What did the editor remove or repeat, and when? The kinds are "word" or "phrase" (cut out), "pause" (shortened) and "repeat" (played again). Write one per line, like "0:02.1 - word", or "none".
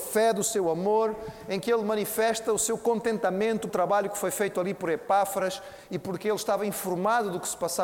0:03.7 - word